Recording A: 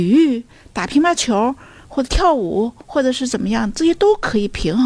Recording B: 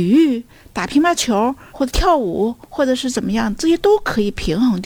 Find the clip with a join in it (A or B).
B